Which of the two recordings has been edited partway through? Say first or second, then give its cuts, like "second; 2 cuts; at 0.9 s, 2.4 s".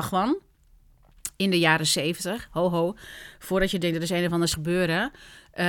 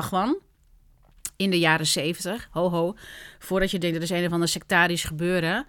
first; 1 cut; at 4.5 s